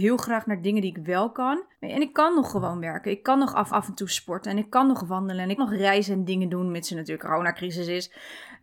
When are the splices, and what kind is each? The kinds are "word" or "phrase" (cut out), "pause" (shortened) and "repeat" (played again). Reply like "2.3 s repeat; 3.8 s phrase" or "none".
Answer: 1.7 s pause; 3.7 s repeat; 5.6 s word; 7.2 s word